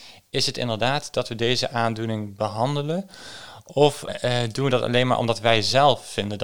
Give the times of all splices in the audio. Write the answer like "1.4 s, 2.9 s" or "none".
4.1 s